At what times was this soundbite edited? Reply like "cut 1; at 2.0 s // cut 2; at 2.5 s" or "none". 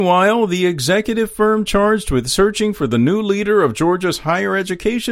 none

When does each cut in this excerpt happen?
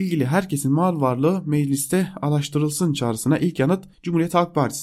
cut 1; at 3.9 s

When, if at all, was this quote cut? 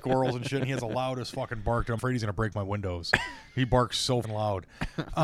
cut 1; at 2.0 s // cut 2; at 4.2 s

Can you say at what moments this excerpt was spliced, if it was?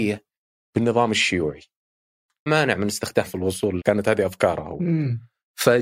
cut 1; at 2.5 s // cut 2; at 3.3 s // cut 3; at 3.8 s

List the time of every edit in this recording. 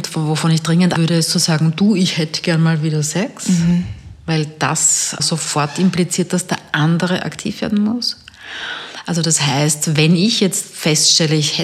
cut 1; at 1.0 s // cut 2; at 5.2 s

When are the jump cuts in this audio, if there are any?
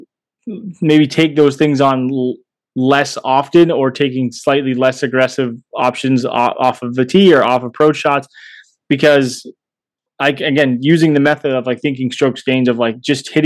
none

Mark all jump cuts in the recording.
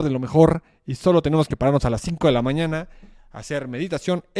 none

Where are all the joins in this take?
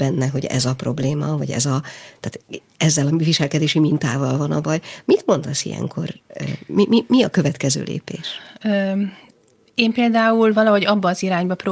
none

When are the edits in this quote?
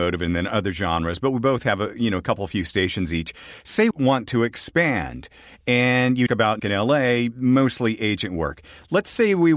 cut 1; at 3.9 s // cut 2; at 6.3 s // cut 3; at 6.6 s

